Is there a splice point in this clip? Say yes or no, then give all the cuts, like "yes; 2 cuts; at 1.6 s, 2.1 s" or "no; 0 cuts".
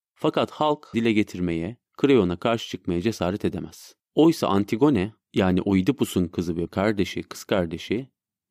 yes; 5 cuts; at 0.9 s, 1.9 s, 4.0 s, 5.2 s, 6.7 s